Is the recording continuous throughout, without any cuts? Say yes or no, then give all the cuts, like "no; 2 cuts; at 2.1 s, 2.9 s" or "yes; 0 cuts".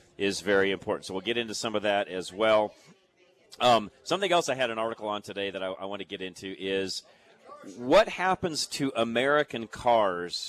yes; 0 cuts